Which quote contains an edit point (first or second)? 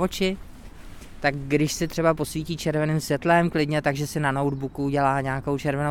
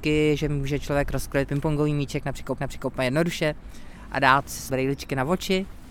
second